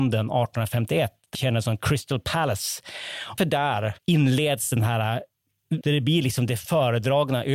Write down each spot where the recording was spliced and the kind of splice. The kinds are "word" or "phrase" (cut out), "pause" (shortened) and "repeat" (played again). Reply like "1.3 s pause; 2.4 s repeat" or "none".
1.3 s word; 3.4 s word; 4.0 s pause; 5.8 s phrase